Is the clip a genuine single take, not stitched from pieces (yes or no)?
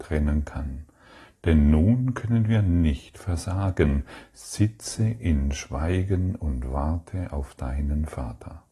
yes